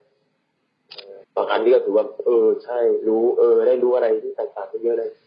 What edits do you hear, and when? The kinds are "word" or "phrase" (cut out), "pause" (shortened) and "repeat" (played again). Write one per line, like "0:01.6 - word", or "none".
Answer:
0:01.2 - pause